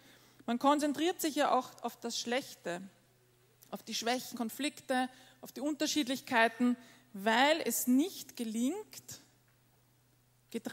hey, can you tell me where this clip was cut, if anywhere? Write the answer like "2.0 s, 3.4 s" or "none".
4.3 s